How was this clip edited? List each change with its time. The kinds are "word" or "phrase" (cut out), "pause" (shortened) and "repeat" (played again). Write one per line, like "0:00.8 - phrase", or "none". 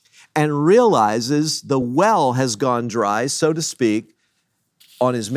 none